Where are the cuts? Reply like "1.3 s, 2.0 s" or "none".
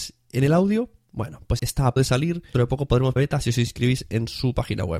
1.6 s, 2.0 s, 2.5 s, 3.2 s